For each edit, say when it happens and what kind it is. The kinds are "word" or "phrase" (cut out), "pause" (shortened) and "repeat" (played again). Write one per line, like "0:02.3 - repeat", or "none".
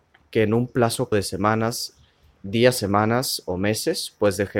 0:01.1 - word
0:02.4 - word